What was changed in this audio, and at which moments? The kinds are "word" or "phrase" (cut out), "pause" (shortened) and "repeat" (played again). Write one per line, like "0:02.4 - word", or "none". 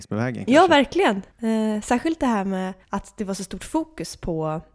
0:01.3 - pause
0:02.8 - pause